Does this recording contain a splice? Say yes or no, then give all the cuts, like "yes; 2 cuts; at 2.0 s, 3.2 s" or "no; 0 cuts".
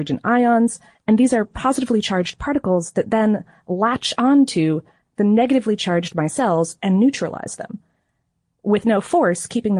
no; 0 cuts